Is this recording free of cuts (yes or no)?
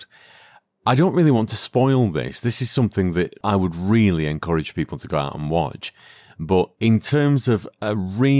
yes